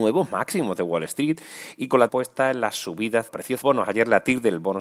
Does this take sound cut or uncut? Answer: cut